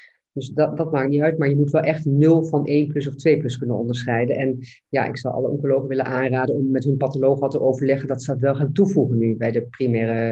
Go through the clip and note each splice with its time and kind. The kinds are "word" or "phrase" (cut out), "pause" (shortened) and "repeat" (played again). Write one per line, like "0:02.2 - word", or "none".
none